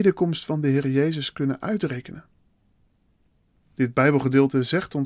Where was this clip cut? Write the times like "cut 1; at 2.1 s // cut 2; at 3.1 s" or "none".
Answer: none